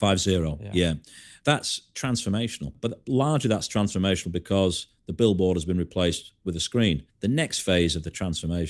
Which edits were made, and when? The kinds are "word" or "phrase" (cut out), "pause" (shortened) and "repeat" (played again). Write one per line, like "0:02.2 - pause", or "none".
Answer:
0:07.1 - pause